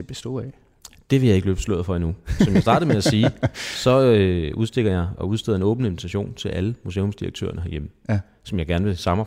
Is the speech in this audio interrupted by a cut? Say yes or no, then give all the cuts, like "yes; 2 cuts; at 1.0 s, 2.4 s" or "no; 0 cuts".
no; 0 cuts